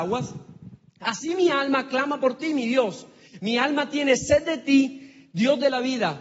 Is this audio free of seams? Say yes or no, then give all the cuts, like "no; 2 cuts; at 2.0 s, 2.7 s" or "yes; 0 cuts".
yes; 0 cuts